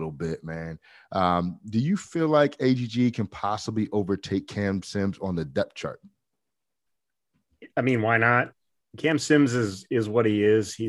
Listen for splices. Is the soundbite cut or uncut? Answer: uncut